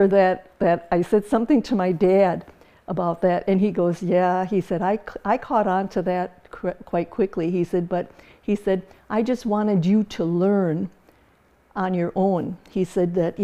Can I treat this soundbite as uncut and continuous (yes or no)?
yes